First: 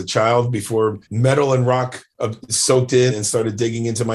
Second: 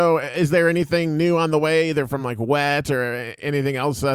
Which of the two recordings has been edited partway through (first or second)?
first